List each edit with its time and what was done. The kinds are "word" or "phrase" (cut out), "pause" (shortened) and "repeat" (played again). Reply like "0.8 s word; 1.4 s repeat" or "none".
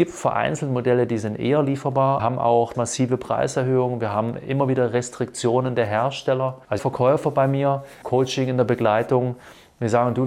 2.2 s phrase; 2.7 s word; 6.8 s phrase; 8.0 s word